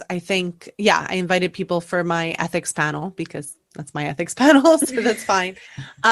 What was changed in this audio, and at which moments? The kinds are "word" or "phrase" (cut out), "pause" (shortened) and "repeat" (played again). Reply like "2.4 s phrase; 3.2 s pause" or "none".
none